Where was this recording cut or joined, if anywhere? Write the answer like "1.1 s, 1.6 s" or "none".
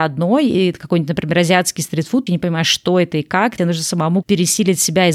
2.3 s, 3.6 s, 4.2 s